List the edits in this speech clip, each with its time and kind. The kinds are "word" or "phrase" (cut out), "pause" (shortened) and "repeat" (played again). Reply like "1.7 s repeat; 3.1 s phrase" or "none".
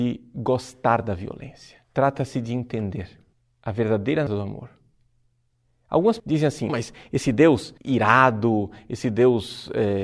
1.8 s pause; 3.3 s pause; 4.3 s word; 6.2 s word; 6.7 s word; 7.8 s pause